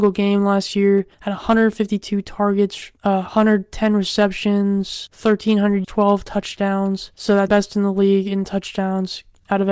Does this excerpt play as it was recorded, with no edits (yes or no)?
no